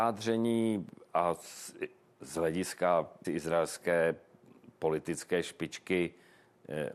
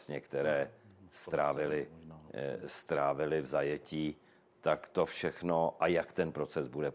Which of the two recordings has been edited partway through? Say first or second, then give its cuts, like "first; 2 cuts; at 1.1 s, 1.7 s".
first; 1 cut; at 3.2 s